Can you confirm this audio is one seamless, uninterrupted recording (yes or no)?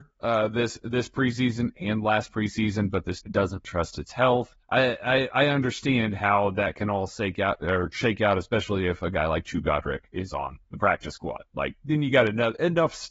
no